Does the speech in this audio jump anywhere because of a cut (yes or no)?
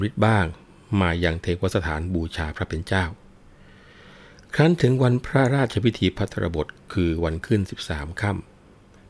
no